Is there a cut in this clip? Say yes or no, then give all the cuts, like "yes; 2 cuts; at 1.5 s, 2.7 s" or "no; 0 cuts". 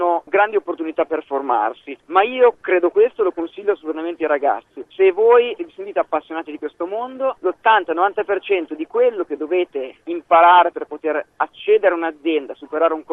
no; 0 cuts